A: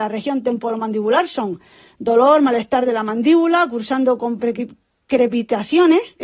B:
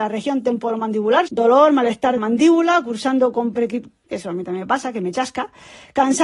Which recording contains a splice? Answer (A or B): B